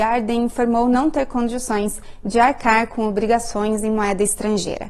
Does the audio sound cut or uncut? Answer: uncut